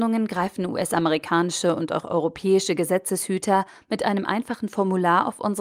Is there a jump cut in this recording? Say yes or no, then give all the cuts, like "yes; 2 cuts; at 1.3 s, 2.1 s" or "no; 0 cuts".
no; 0 cuts